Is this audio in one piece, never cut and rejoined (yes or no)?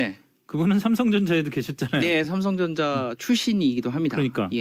yes